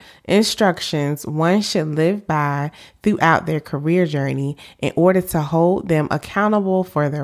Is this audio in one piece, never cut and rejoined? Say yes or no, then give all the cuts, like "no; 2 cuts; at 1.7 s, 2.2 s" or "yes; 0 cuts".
yes; 0 cuts